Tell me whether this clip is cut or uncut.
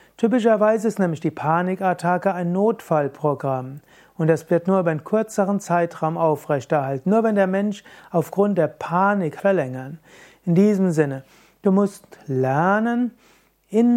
cut